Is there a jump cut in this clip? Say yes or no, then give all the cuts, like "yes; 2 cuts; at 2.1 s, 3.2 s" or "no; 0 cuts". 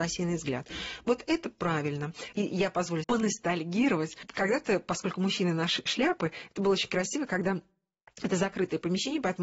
yes; 2 cuts; at 3.0 s, 5.9 s